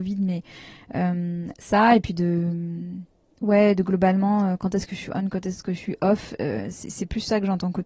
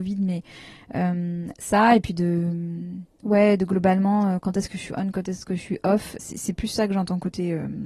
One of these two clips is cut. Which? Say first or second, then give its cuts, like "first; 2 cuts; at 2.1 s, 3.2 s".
second; 2 cuts; at 3.1 s, 6.2 s